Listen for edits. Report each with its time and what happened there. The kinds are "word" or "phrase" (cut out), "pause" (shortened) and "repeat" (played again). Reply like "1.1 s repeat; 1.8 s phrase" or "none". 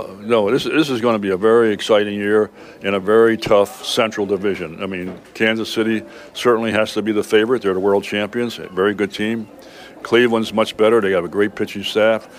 none